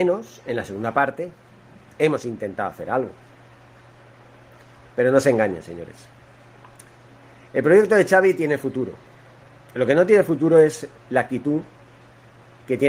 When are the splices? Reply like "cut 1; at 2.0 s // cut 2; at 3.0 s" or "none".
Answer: none